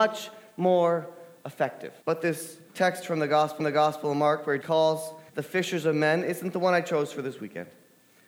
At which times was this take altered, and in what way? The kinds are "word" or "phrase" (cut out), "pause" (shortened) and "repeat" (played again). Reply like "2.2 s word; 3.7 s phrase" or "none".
2.0 s pause; 2.7 s pause; 3.6 s repeat; 4.6 s word; 5.3 s pause